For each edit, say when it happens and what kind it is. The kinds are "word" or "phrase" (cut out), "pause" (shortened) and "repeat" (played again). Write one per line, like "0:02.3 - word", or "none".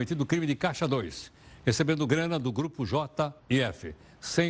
0:03.4 - pause